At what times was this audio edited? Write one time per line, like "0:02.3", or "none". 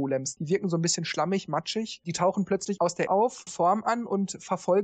0:03.1
0:03.5